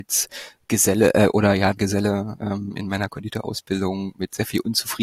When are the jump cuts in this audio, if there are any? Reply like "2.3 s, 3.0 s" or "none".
1.8 s